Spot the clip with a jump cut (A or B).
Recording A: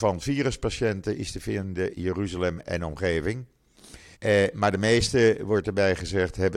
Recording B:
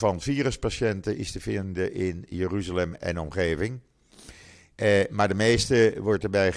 A